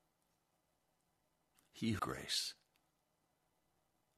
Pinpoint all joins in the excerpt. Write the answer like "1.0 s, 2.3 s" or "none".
2.0 s